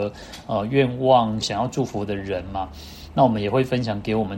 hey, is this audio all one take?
no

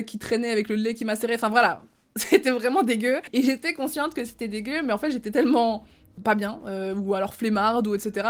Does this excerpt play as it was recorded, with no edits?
yes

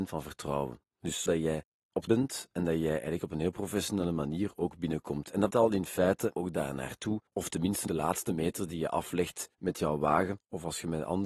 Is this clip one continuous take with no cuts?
no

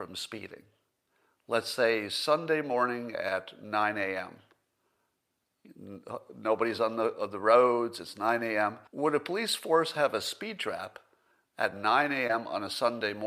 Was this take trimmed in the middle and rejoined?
yes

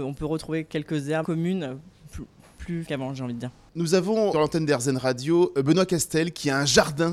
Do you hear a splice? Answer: yes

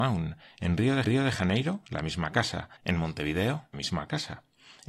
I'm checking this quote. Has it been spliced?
yes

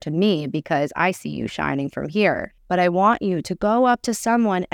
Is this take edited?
yes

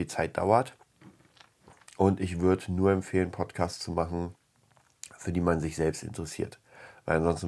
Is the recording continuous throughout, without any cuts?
yes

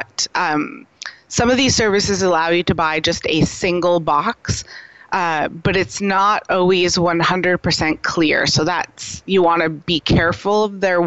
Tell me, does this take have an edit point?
no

